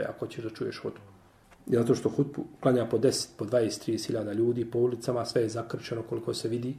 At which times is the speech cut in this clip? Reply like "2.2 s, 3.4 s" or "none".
none